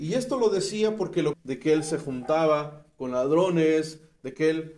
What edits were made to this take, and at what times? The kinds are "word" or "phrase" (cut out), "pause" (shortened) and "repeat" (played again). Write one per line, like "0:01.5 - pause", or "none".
0:01.3 - word